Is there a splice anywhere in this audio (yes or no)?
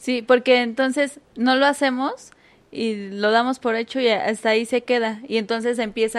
no